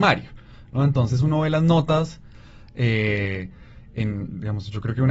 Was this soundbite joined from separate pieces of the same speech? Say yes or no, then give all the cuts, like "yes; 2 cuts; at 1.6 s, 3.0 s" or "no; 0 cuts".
no; 0 cuts